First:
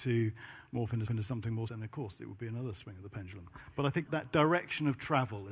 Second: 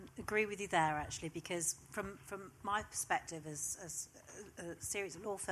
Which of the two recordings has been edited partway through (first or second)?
first